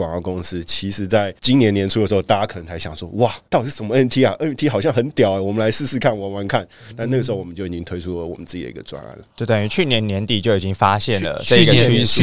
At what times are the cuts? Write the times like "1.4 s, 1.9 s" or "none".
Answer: none